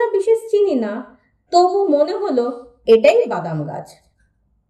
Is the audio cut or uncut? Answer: uncut